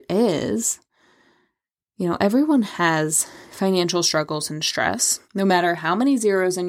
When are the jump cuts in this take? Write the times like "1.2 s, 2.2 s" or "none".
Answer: 3.5 s, 5.2 s